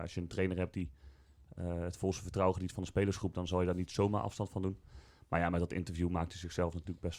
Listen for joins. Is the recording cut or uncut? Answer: uncut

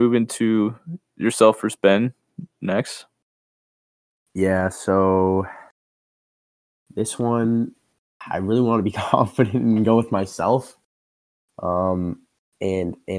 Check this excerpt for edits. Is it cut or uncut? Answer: uncut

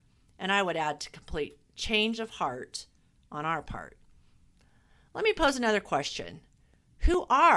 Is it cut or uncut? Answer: uncut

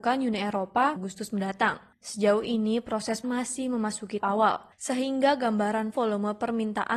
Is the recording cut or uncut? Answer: cut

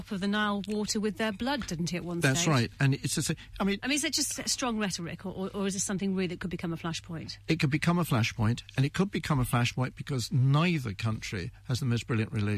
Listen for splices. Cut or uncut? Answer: uncut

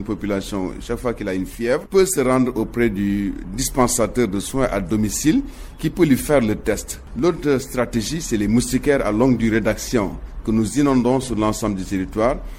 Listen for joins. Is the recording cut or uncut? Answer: uncut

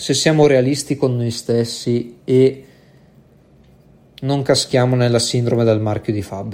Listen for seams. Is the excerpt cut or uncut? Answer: uncut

